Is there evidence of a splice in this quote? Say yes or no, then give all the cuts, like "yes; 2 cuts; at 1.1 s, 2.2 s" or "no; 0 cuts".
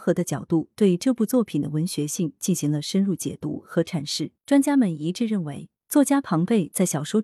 yes; 1 cut; at 4.4 s